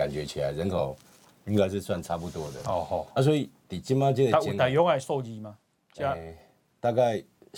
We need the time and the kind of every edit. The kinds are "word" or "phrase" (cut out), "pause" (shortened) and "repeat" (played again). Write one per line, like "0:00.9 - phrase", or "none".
none